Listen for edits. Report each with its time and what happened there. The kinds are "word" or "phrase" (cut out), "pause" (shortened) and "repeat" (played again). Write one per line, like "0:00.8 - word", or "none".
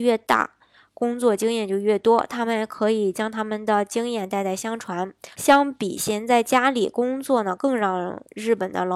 0:05.3 - pause